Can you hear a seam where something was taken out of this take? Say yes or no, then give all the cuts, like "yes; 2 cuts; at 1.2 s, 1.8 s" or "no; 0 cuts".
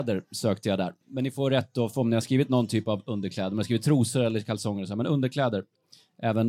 yes; 1 cut; at 1.0 s